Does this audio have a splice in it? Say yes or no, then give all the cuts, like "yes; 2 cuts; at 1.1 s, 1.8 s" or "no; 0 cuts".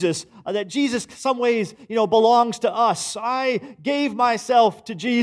no; 0 cuts